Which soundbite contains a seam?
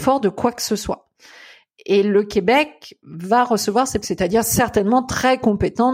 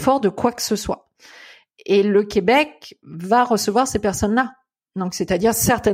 first; 1 cut; at 4.0 s

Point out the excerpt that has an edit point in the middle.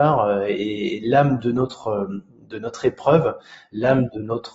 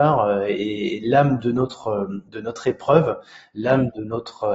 second; 1 cut; at 2.3 s

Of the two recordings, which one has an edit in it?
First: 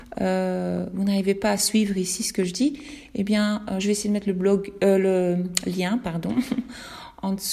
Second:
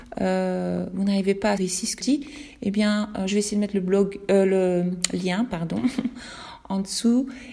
second; 2 cuts; at 1.6 s, 2.0 s

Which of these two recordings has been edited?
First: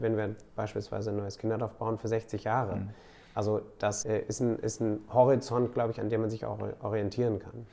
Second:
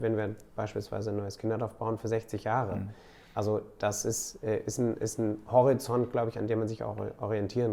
first; 1 cut; at 4.0 s

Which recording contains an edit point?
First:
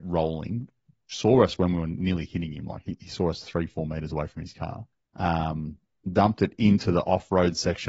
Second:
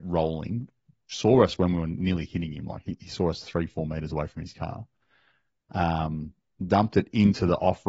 first; 1 cut; at 4.9 s

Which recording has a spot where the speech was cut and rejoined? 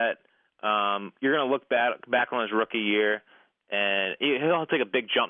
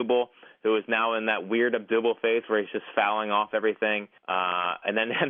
second; 1 cut; at 4.2 s

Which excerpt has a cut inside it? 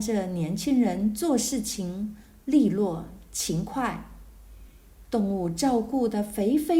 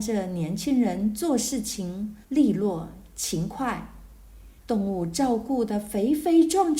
second; 2 cuts; at 2.2 s, 4.6 s

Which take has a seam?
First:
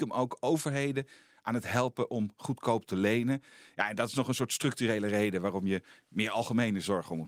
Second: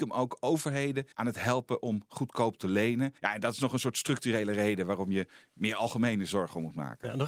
second; 2 cuts; at 1.1 s, 3.2 s

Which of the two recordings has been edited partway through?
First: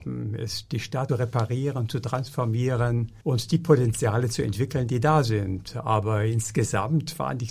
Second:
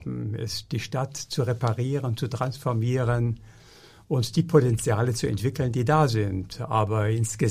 first; 2 cuts; at 1.1 s, 3.2 s

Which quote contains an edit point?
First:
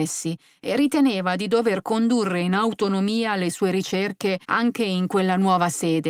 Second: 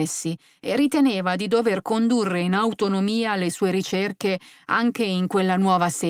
first; 1 cut; at 4.4 s

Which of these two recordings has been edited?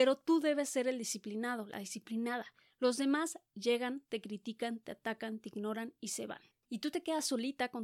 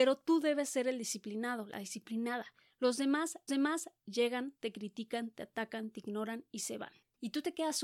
second; 1 cut; at 3.5 s

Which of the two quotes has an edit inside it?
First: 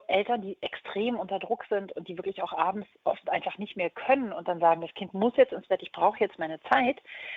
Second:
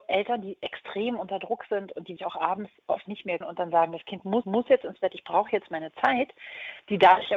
second; 4 cuts; at 2.2 s, 3.1 s, 3.4 s, 4.4 s

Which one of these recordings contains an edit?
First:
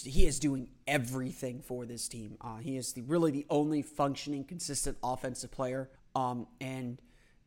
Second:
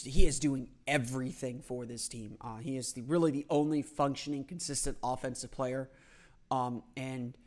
first; 1 cut; at 6.0 s

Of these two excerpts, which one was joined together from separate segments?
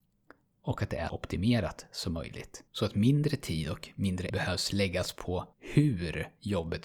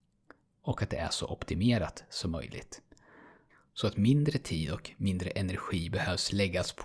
first; 4 cuts; at 1.1 s, 2.7 s, 4.3 s, 5.5 s

